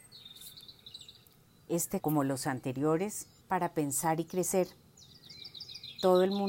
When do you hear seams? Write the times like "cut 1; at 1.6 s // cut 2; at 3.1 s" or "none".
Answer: cut 1; at 2.0 s // cut 2; at 3.4 s